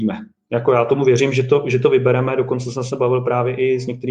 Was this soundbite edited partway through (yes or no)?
no